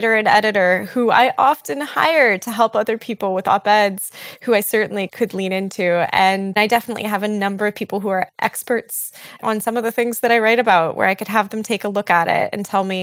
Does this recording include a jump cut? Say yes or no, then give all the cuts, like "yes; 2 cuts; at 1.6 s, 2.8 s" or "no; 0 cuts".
yes; 1 cut; at 8.3 s